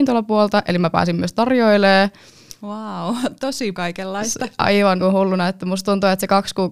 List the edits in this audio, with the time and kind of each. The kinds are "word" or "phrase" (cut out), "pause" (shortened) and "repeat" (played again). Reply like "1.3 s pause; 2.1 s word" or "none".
3.7 s word; 5.0 s word